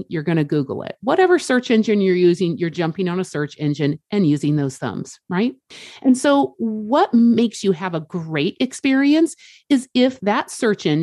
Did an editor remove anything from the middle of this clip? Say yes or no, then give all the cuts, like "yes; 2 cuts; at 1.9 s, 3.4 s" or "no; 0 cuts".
no; 0 cuts